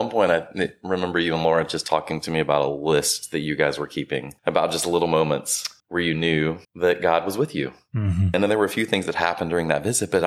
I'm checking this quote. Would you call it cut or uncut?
cut